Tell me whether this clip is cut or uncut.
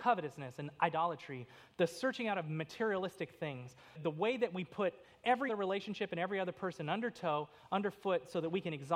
cut